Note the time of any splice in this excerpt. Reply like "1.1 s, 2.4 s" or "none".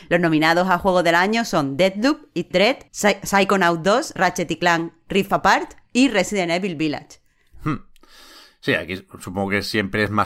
2.5 s, 2.9 s, 4.2 s